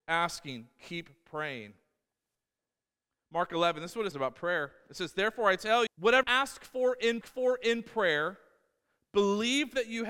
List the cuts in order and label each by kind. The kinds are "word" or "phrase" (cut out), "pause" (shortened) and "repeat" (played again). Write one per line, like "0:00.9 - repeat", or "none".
0:04.1 - word
0:05.9 - word
0:06.2 - word
0:07.2 - repeat